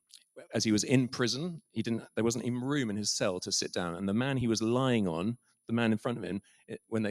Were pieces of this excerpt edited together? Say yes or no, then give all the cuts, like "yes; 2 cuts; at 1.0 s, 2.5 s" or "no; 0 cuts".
no; 0 cuts